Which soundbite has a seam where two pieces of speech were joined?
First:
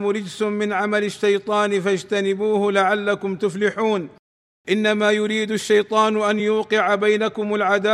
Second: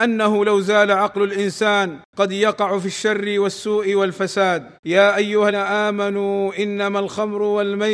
second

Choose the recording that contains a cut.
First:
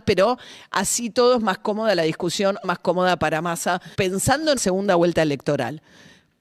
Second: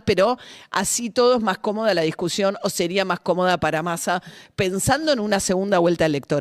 first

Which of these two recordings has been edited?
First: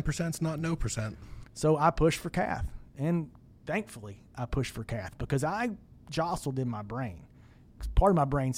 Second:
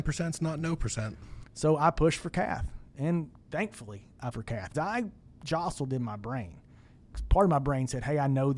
second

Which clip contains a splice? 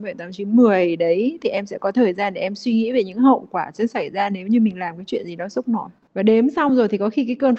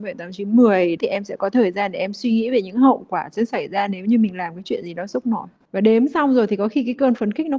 second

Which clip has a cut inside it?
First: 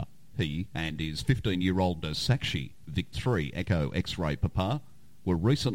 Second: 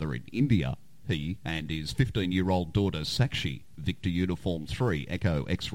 first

